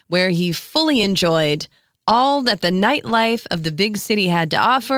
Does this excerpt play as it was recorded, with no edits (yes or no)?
yes